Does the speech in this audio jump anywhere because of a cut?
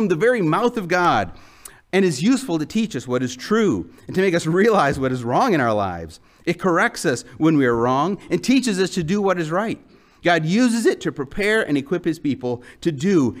no; 0 cuts

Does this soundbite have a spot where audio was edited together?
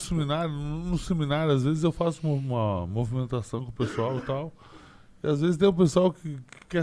no; 0 cuts

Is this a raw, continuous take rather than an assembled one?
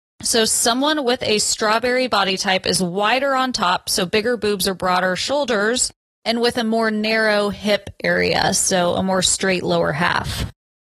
yes; 0 cuts

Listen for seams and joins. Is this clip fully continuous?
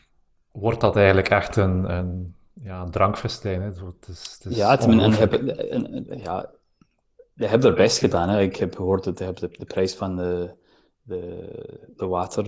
yes; 0 cuts

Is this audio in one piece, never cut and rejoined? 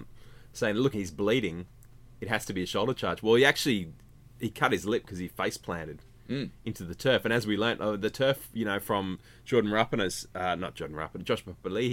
no; 1 cut; at 0.9 s

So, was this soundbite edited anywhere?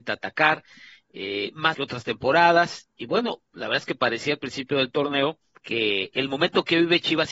yes; 2 cuts; at 1.7 s, 5.6 s

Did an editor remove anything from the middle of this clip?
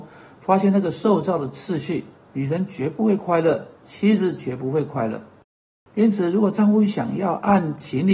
yes; 1 cut; at 3.7 s

